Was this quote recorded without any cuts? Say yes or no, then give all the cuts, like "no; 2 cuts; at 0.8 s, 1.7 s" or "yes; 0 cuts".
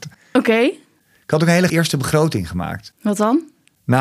no; 1 cut; at 1.7 s